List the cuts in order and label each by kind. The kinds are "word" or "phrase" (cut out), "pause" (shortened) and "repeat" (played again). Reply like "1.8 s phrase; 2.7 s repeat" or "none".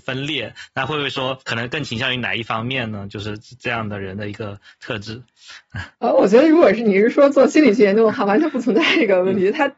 1.4 s pause; 5.9 s pause